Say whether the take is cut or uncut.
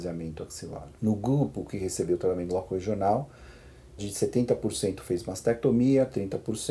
cut